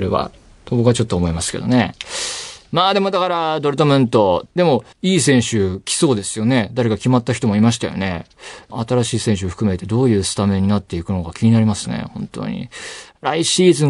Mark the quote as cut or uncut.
cut